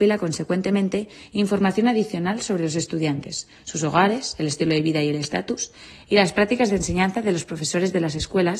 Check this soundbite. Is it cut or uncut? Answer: uncut